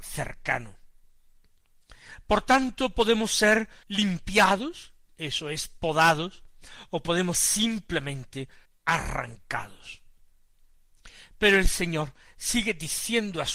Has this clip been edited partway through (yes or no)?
yes